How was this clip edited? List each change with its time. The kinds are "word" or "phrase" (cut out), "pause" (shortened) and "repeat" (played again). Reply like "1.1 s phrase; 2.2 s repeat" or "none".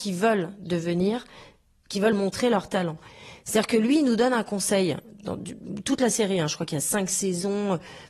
none